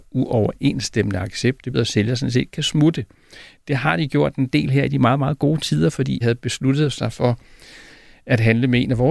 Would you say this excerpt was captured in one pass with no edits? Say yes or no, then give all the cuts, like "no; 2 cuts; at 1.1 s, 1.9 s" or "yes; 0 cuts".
no; 2 cuts; at 1.7 s, 6.2 s